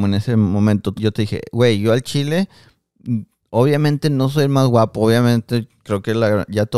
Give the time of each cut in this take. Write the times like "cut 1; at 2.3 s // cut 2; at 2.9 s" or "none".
cut 1; at 1.0 s // cut 2; at 3.4 s